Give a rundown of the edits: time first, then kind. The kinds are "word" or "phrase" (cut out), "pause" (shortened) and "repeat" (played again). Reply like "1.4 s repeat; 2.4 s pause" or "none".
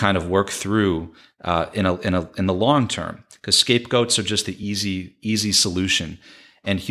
none